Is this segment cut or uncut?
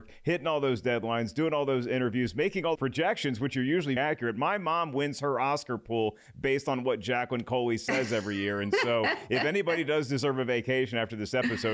cut